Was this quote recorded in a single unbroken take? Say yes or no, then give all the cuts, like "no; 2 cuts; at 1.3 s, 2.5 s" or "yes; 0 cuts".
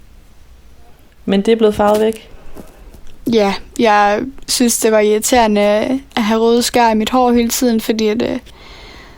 yes; 0 cuts